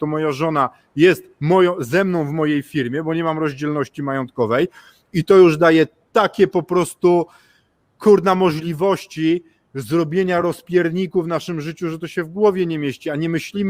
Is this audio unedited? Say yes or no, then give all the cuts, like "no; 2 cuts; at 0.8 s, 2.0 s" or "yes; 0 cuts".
yes; 0 cuts